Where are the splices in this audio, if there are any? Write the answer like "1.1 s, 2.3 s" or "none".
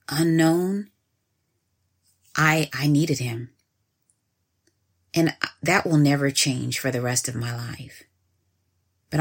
none